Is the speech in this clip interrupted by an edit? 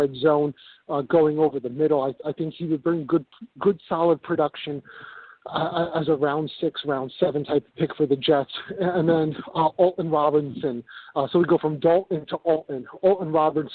no; 0 cuts

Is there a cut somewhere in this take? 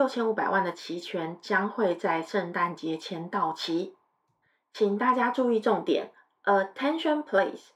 no; 0 cuts

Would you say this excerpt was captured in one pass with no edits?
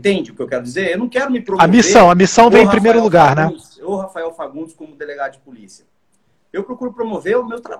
yes; 0 cuts

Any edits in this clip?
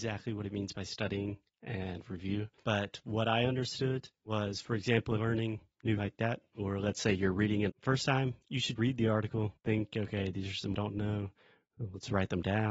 yes; 6 cuts; at 5.2 s, 6.0 s, 7.7 s, 8.8 s, 9.6 s, 10.7 s

